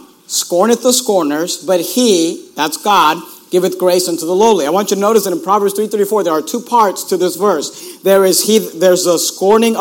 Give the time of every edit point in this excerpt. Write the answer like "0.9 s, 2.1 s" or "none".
none